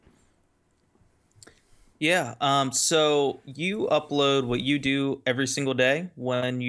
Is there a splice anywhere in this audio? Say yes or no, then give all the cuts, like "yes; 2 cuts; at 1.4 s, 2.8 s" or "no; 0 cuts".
no; 0 cuts